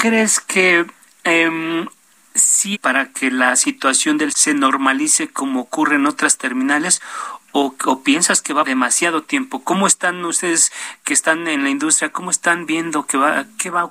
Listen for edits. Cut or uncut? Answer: cut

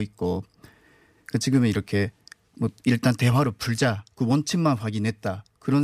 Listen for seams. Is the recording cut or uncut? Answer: uncut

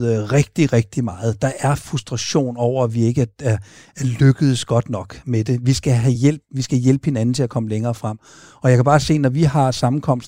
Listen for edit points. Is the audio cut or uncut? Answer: uncut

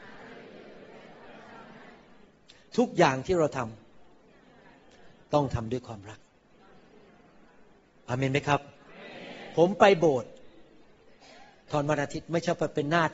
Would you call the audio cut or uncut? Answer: uncut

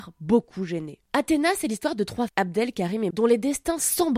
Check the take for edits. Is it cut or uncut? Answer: cut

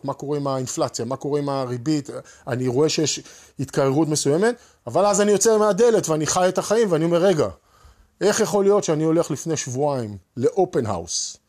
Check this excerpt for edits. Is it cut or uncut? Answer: uncut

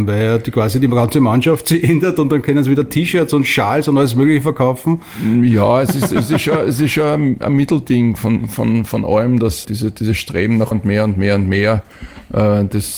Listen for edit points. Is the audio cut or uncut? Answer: cut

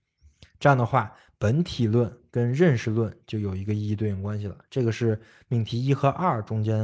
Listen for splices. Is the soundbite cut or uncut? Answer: uncut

